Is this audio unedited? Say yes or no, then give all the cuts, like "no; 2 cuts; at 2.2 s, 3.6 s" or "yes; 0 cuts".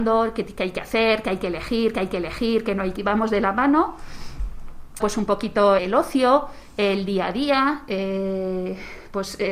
no; 4 cuts; at 1.9 s, 3.0 s, 5.0 s, 5.8 s